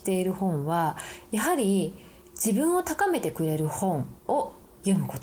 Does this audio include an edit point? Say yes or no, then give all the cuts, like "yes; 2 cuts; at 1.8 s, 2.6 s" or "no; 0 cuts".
yes; 1 cut; at 4.2 s